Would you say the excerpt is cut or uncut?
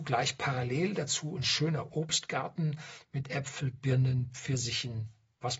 uncut